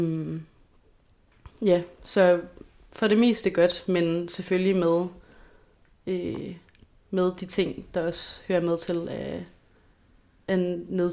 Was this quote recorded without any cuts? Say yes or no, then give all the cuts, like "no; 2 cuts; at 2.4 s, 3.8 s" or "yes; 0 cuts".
yes; 0 cuts